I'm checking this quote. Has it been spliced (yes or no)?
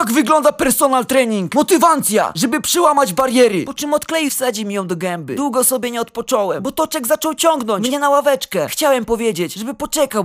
yes